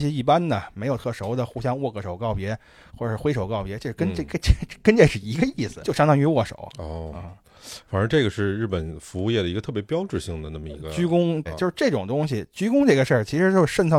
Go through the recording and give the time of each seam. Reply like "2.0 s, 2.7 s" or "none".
5.8 s, 11.5 s